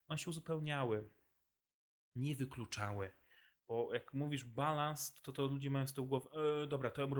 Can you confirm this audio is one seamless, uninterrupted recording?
yes; 0 cuts

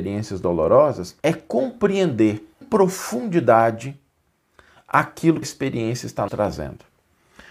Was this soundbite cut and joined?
yes; 4 cuts; at 1.2 s, 2.6 s, 5.4 s, 6.3 s

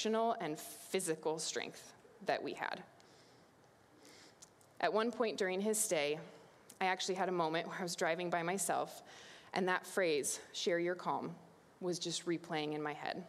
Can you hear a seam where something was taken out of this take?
no; 0 cuts

